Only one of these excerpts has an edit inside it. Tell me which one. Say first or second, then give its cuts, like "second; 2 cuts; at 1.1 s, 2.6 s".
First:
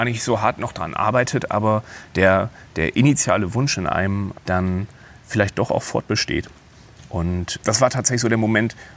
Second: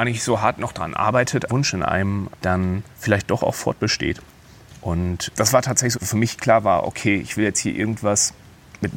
second; 3 cuts; at 1.5 s, 2.9 s, 5.9 s